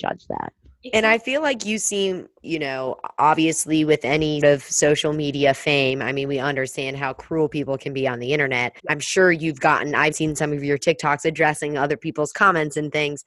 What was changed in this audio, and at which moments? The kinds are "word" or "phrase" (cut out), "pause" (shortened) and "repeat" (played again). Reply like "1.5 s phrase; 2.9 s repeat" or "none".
2.4 s word; 4.4 s word; 8.8 s pause; 10.1 s word